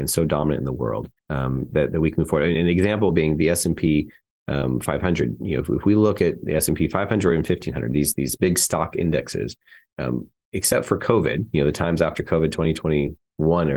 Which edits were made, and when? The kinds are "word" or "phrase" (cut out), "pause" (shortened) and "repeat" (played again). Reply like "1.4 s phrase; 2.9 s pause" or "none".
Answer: 1.2 s pause